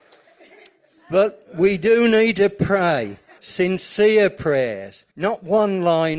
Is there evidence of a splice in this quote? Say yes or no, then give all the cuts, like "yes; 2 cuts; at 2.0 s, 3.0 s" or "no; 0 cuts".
yes; 2 cuts; at 3.4 s, 5.1 s